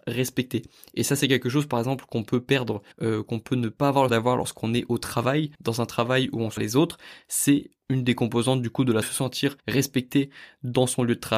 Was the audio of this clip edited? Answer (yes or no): yes